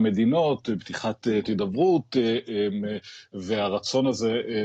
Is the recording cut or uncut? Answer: cut